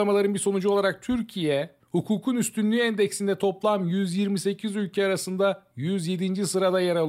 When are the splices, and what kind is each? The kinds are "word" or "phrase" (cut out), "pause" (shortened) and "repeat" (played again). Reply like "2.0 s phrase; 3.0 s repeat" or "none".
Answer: none